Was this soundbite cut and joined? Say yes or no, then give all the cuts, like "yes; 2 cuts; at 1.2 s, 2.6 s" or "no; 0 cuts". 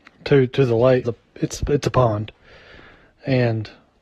yes; 1 cut; at 1.0 s